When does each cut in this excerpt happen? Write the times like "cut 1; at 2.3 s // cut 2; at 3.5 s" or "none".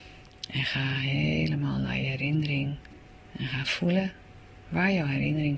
none